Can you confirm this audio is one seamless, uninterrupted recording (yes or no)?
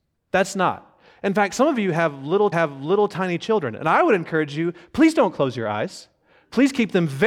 no